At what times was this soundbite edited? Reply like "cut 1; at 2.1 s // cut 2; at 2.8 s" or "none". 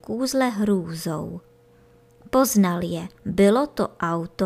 cut 1; at 3.2 s